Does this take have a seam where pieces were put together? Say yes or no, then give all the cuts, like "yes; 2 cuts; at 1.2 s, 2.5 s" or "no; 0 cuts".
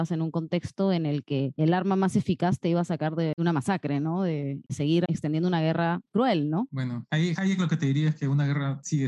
yes; 1 cut; at 6.0 s